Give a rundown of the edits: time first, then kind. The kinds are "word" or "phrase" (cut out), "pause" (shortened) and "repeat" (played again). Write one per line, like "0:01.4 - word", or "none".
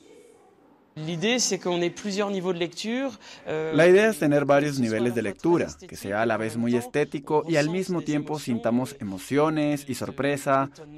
none

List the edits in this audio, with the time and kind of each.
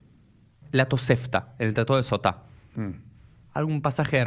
none

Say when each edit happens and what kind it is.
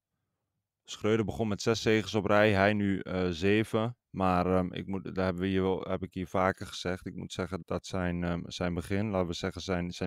0:04.0 - pause
0:07.6 - word

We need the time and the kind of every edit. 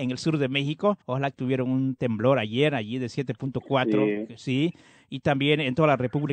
0:01.0 - pause
0:01.3 - phrase

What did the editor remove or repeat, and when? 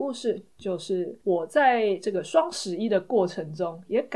0:01.2 - pause

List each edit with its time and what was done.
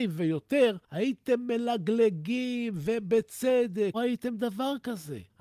0:03.9 - phrase

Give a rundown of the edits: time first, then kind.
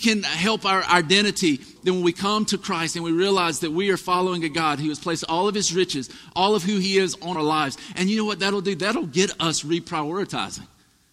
0:01.8 - word
0:07.3 - word

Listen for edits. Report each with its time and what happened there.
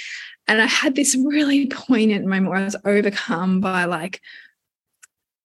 none

